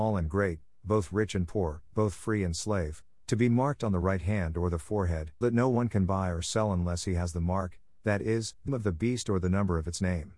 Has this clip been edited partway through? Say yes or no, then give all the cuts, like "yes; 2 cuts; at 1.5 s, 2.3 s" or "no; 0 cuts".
yes; 2 cuts; at 5.4 s, 8.7 s